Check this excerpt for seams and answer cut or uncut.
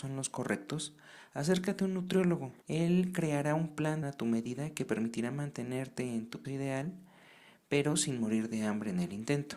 cut